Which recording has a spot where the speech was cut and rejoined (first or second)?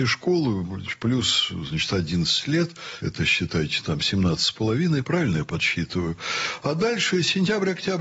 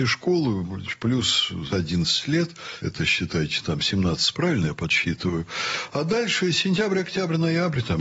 second